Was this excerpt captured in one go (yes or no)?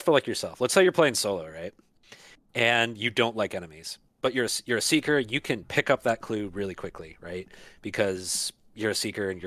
yes